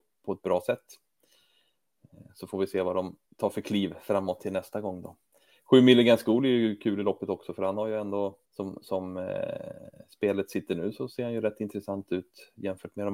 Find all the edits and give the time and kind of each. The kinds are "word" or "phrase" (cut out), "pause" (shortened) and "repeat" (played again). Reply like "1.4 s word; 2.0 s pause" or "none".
2.3 s pause; 3.2 s pause; 8.4 s pause